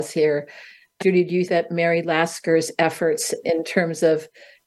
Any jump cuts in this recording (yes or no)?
yes